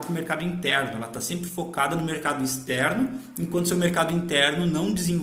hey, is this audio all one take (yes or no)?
yes